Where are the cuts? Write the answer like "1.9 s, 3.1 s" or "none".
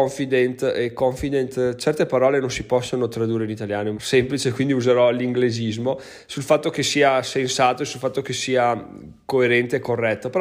3.9 s